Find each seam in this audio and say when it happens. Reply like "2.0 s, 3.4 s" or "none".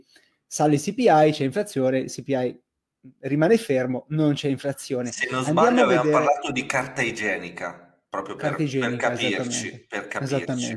3.1 s